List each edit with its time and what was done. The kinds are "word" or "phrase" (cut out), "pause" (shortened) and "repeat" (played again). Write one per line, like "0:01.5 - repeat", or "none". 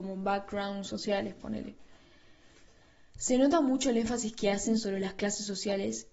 none